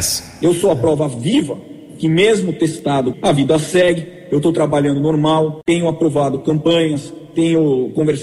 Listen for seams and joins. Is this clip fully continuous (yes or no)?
no